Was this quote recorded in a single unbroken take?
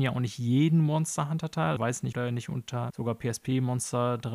no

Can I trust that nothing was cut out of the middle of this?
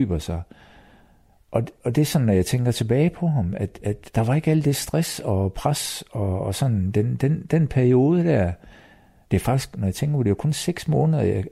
yes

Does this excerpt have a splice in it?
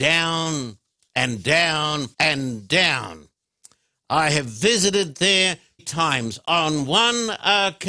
yes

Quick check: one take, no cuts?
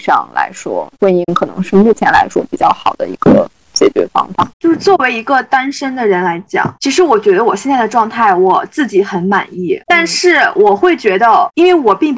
no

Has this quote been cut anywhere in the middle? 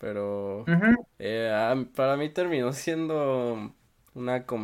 yes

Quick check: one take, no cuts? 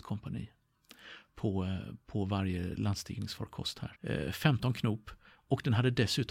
no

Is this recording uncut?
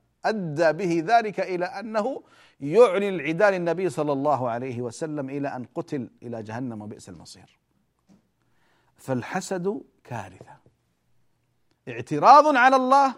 yes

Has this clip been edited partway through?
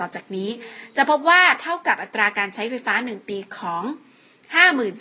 no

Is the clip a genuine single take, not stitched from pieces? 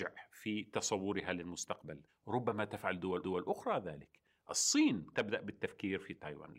no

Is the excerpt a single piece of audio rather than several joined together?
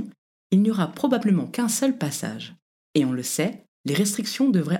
yes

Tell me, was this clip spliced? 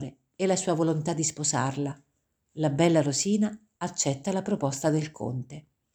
no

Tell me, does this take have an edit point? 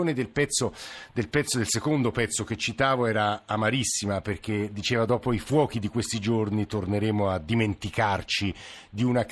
no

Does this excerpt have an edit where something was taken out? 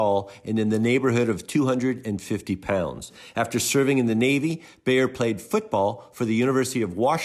no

